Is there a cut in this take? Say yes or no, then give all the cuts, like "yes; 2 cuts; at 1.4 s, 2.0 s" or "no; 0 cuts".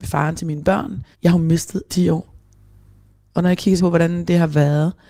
yes; 3 cuts; at 1.1 s, 1.9 s, 3.8 s